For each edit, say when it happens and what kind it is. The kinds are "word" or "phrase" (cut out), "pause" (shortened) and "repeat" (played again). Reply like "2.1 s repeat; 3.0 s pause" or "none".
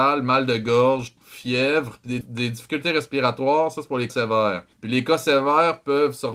1.2 s word; 2.2 s word; 4.1 s word; 4.7 s pause

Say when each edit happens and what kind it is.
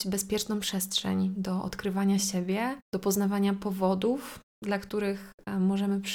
none

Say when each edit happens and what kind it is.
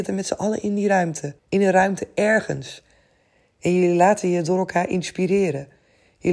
1.4 s pause

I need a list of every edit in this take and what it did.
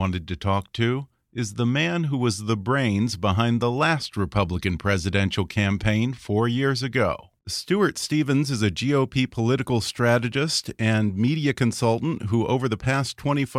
7.4 s pause

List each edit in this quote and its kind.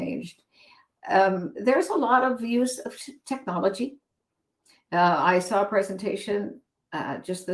none

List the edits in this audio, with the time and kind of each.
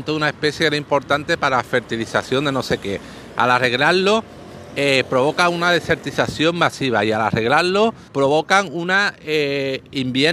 8.1 s pause

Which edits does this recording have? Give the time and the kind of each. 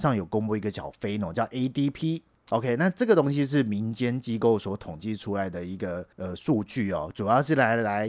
6.1 s pause

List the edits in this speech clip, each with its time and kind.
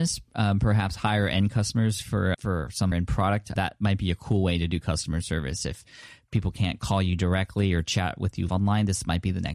2.3 s word; 2.9 s word; 3.6 s word; 8.5 s word

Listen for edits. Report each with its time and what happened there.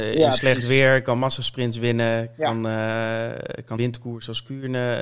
3.8 s word

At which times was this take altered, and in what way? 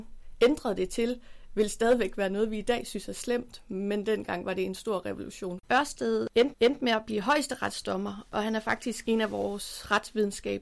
5.6 s pause; 6.5 s repeat

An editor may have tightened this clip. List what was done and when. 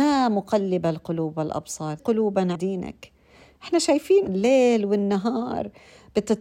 2.0 s word; 2.6 s word; 4.3 s word

